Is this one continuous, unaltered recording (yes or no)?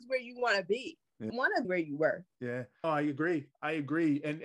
no